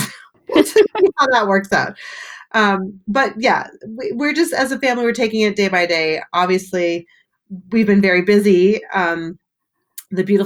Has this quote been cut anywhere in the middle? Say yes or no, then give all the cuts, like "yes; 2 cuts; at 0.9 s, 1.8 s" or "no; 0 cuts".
no; 0 cuts